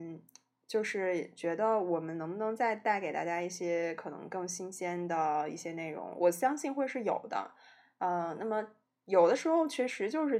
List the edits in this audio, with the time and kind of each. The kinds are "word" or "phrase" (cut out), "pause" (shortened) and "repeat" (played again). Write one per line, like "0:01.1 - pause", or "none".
none